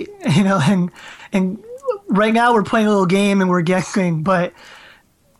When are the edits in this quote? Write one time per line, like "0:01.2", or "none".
none